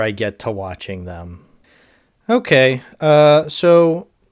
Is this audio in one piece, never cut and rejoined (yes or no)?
yes